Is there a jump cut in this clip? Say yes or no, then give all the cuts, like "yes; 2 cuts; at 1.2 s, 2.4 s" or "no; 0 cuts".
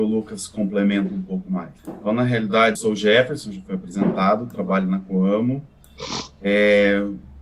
yes; 2 cuts; at 1.8 s, 2.7 s